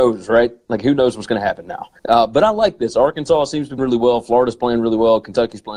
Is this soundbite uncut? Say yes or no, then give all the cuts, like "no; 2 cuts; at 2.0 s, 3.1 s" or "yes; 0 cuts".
no; 2 cuts; at 2.0 s, 3.8 s